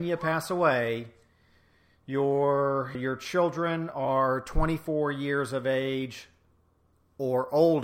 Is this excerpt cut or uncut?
cut